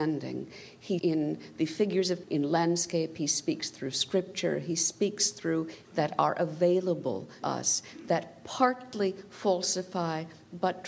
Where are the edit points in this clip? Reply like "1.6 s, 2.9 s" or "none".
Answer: 1.0 s, 2.2 s, 5.8 s, 7.4 s